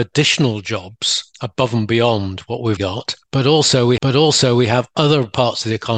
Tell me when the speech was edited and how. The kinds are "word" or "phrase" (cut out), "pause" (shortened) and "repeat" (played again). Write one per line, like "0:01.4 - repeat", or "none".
0:02.8 - word
0:04.0 - repeat